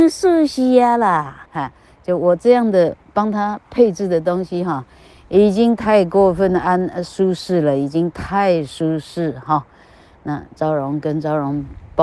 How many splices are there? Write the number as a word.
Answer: one